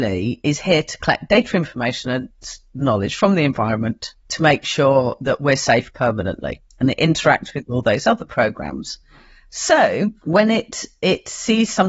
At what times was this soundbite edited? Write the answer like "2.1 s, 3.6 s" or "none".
4.2 s, 6.7 s, 10.2 s